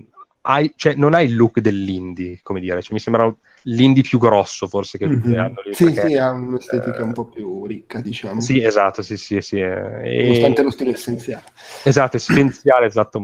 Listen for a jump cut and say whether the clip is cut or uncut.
uncut